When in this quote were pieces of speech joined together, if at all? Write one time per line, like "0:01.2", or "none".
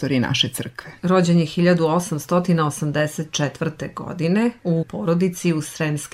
0:01.0
0:04.8